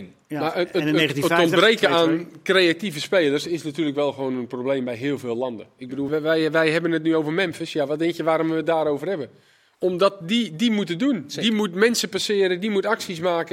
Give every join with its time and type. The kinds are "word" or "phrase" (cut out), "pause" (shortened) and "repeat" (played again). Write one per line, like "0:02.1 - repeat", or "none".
0:06.1 - word